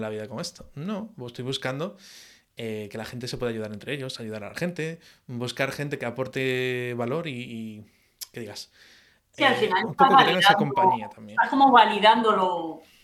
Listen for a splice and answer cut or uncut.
uncut